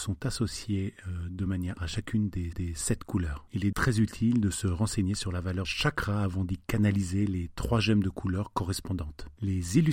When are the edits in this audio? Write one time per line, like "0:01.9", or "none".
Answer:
0:01.8
0:02.5
0:03.7
0:05.6